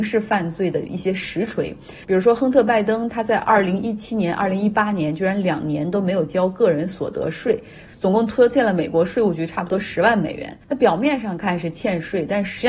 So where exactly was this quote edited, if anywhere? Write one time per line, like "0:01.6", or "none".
0:10.6